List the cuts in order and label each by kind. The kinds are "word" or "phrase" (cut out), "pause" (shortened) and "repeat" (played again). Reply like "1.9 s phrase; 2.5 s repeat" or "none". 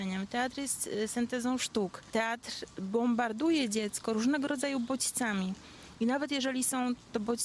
none